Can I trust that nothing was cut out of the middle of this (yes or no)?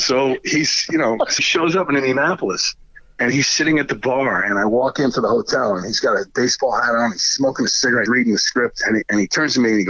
no